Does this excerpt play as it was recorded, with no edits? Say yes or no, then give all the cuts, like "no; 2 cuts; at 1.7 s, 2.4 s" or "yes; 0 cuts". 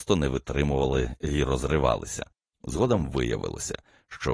yes; 0 cuts